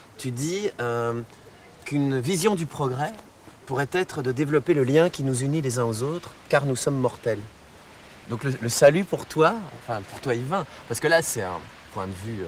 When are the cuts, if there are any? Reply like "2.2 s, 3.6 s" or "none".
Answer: 3.6 s